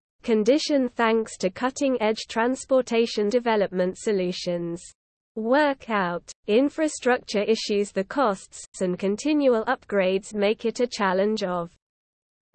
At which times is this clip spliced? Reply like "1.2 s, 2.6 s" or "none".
3.3 s, 6.4 s, 8.7 s, 10.3 s